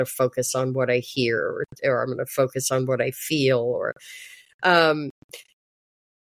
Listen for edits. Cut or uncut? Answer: uncut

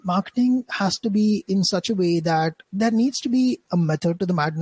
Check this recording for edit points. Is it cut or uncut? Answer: cut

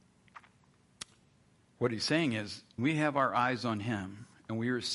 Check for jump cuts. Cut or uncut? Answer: cut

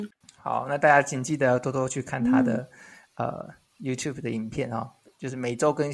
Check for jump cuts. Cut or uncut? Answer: uncut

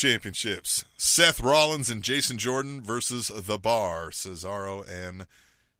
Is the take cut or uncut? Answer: uncut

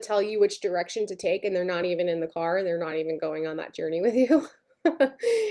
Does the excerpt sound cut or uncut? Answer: uncut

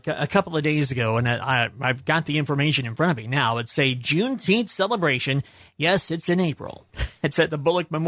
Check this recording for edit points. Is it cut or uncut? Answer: uncut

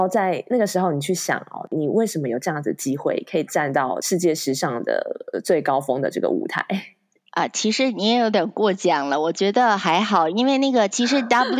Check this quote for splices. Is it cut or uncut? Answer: uncut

